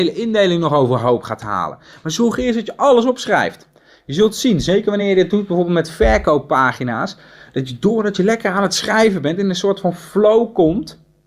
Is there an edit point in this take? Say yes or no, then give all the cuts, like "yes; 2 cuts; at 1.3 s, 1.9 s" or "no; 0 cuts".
no; 0 cuts